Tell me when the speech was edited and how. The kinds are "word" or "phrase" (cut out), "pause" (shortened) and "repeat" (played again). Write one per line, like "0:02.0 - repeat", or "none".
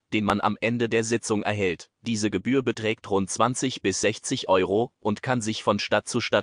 0:01.9 - pause